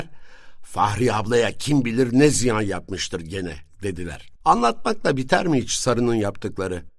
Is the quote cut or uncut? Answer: cut